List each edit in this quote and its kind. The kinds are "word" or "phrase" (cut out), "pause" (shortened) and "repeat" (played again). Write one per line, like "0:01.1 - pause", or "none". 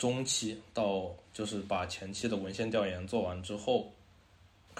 0:01.2 - pause